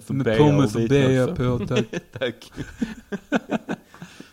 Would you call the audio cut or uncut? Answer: uncut